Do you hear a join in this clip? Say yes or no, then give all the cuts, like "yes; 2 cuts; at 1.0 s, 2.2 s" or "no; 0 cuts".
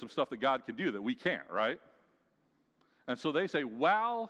no; 0 cuts